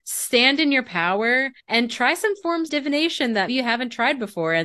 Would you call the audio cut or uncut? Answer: cut